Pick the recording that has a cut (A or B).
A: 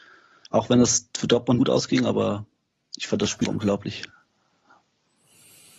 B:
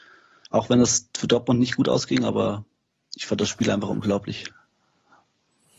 A